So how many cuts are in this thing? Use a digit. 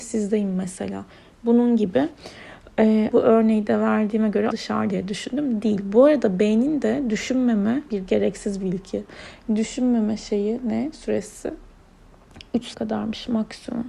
5